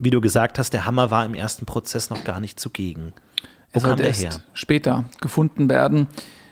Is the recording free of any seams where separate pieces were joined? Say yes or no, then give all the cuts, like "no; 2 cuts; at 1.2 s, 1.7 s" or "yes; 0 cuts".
yes; 0 cuts